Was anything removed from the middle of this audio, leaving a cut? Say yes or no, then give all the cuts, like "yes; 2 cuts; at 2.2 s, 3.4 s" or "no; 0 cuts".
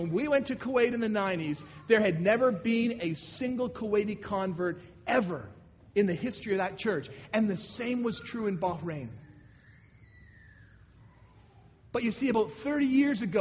no; 0 cuts